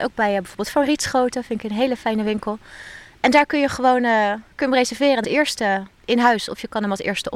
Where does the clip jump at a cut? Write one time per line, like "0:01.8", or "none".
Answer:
0:05.2